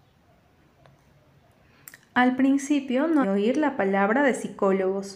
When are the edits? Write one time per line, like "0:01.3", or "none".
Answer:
0:03.2